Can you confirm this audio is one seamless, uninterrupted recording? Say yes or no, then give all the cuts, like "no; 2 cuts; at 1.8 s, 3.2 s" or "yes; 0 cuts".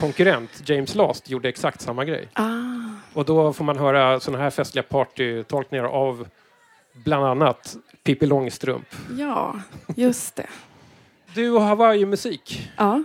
no; 1 cut; at 10.6 s